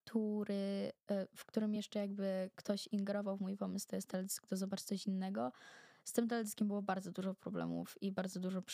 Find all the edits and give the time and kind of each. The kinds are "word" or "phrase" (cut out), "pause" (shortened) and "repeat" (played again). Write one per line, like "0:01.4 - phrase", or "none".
none